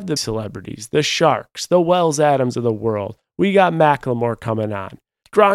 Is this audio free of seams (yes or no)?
yes